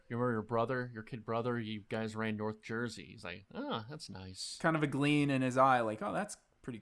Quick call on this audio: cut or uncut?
uncut